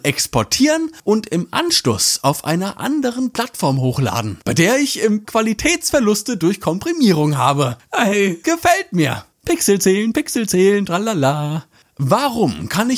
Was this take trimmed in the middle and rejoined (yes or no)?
yes